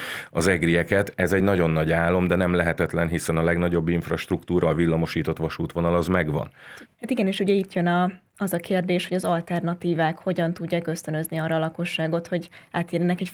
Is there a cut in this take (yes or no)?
no